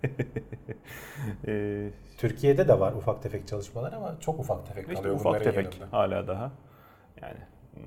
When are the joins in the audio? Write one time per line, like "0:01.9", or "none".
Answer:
none